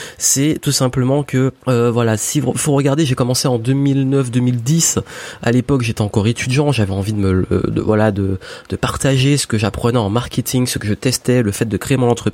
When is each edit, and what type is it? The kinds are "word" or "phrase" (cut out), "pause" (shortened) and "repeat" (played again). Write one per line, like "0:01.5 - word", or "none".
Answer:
0:01.6 - pause